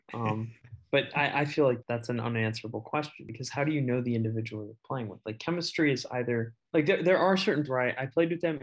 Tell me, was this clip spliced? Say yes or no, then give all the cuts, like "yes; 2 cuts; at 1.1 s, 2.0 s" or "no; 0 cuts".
yes; 3 cuts; at 1.8 s, 6.7 s, 7.6 s